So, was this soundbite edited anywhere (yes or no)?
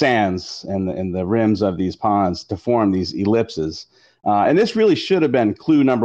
no